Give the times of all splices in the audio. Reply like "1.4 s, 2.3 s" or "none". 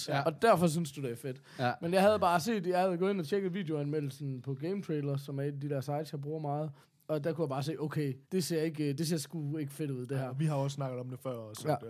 6.8 s, 8.2 s